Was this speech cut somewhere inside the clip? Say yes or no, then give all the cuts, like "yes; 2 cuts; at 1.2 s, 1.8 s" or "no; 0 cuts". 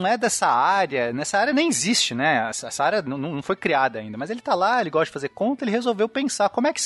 no; 0 cuts